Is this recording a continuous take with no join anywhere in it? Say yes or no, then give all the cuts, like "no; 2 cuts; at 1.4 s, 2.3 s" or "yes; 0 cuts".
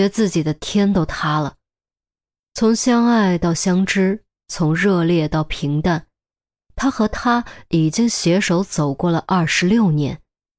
yes; 0 cuts